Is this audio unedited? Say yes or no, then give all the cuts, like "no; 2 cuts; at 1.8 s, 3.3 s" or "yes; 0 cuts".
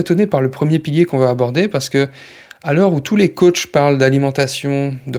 yes; 0 cuts